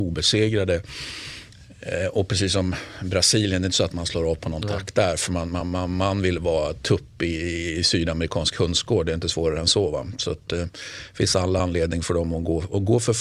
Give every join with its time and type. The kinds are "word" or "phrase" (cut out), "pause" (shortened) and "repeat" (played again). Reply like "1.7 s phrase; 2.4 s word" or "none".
none